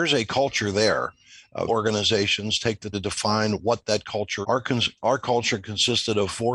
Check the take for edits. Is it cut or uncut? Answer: cut